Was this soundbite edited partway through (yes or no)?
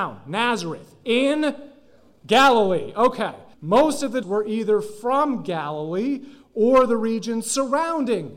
yes